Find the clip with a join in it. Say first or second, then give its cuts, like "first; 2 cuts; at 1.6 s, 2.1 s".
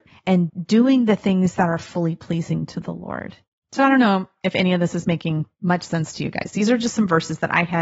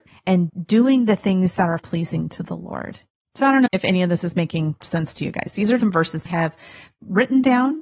second; 5 cuts; at 1.8 s, 3.7 s, 4.8 s, 5.8 s, 6.3 s